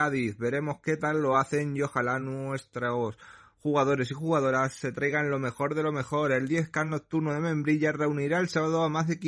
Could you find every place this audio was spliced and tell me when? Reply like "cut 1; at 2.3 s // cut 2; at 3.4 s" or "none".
none